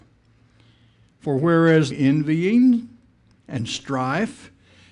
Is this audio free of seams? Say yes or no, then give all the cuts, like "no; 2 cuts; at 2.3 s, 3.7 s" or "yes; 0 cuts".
no; 1 cut; at 1.9 s